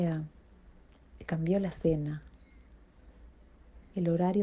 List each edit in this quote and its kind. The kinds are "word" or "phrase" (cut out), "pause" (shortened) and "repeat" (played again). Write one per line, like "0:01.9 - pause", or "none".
none